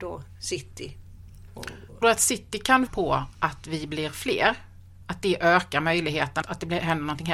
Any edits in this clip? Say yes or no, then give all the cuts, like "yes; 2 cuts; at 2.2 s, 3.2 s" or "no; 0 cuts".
yes; 3 cuts; at 2.0 s, 2.9 s, 6.4 s